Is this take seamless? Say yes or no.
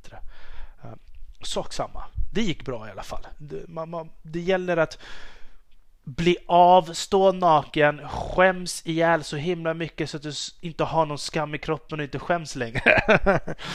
yes